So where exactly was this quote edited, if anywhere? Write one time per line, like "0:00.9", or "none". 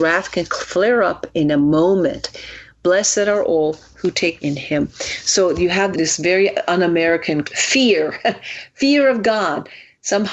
0:04.4
0:05.9
0:07.4